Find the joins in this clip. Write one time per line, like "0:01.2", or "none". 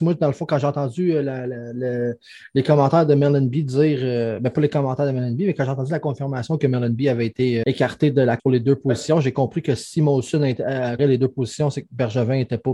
0:07.6
0:08.4
0:11.0